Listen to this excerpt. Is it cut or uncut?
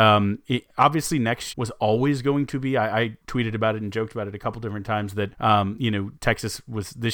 cut